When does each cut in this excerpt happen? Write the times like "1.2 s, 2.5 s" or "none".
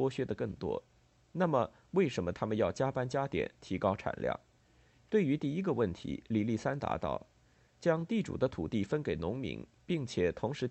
4.6 s, 7.3 s